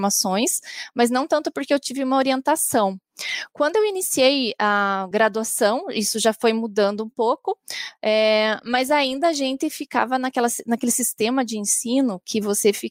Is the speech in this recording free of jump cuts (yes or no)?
yes